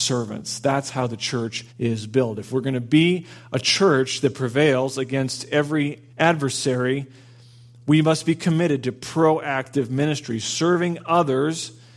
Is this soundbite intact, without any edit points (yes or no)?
no